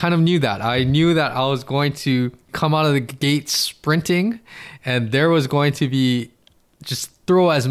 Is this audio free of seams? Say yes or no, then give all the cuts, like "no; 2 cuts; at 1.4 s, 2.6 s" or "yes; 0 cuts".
yes; 0 cuts